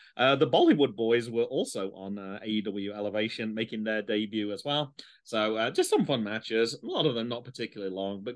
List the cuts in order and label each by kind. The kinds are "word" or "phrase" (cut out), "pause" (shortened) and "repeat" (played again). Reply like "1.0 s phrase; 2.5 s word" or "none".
none